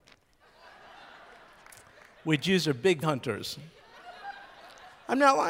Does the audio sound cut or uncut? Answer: cut